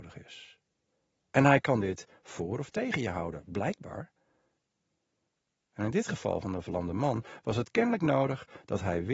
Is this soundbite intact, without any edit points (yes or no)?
yes